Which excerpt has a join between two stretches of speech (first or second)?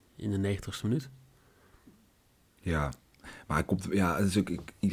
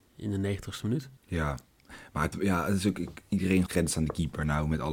second